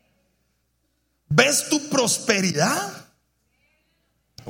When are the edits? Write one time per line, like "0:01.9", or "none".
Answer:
none